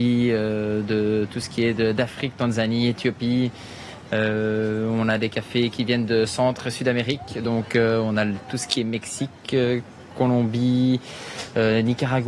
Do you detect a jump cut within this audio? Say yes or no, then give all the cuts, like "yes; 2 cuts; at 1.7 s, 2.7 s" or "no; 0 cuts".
no; 0 cuts